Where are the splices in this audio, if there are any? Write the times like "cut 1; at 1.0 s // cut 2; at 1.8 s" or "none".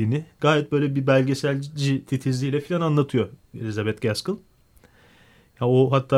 none